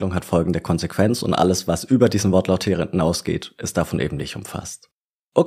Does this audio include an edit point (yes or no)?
no